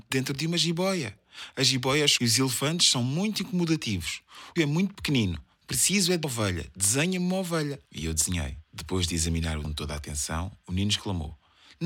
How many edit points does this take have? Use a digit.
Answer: 6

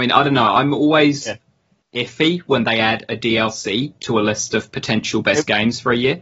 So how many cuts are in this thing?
0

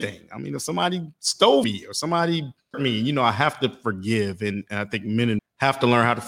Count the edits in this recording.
3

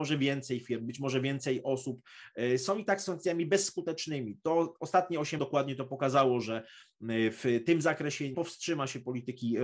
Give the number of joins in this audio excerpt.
2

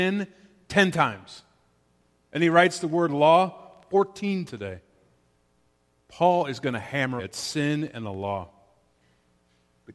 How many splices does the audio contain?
2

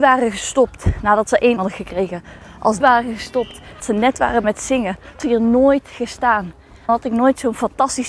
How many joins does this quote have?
6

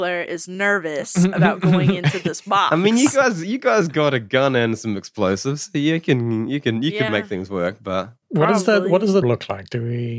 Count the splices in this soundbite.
3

